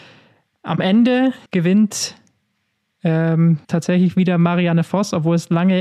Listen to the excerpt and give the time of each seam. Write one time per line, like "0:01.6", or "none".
0:01.5
0:03.6